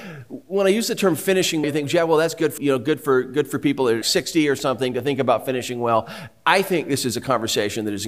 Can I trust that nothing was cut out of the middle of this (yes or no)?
no